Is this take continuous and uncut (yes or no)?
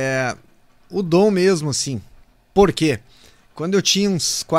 yes